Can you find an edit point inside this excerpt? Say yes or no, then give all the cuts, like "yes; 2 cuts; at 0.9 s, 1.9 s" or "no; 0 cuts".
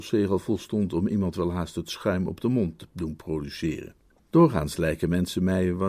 no; 0 cuts